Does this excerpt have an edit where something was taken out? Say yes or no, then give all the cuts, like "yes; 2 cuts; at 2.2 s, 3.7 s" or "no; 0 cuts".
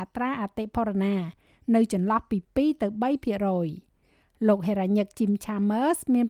no; 0 cuts